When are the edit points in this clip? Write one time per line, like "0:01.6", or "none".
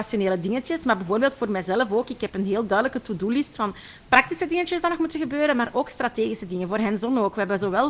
none